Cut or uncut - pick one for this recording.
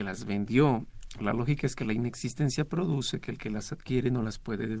uncut